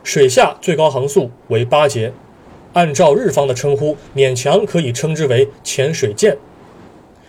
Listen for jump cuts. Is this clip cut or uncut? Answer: uncut